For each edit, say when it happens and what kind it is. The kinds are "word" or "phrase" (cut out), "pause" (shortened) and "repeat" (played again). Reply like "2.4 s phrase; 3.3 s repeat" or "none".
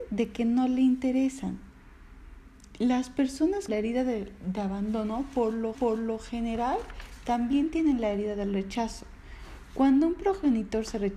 3.7 s word; 5.7 s repeat